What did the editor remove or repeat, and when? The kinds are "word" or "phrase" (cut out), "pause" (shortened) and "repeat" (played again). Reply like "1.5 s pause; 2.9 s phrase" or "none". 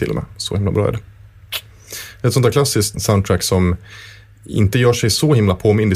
2.9 s word